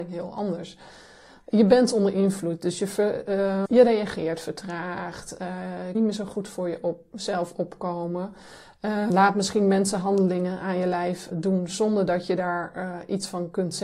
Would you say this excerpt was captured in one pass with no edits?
no; 4 cuts; at 3.7 s, 5.9 s, 9.1 s, 11.3 s

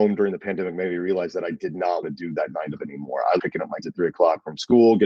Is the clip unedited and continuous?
no; 4 cuts; at 2.0 s, 2.8 s, 3.4 s, 3.8 s

